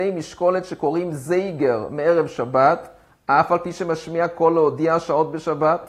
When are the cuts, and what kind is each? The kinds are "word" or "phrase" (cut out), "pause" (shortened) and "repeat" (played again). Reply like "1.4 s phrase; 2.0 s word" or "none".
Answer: none